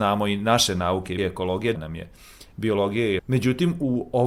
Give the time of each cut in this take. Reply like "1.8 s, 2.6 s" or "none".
1.2 s, 1.7 s, 3.2 s